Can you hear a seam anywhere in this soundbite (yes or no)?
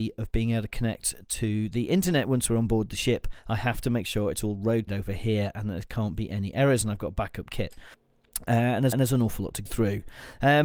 yes